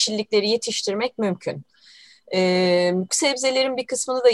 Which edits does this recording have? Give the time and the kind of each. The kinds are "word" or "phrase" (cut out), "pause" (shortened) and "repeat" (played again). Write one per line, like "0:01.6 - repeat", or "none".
0:03.1 - word